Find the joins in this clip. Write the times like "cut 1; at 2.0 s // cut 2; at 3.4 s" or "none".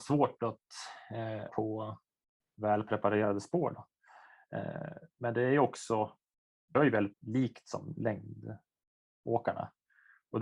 cut 1; at 1.5 s // cut 2; at 6.7 s // cut 3; at 7.1 s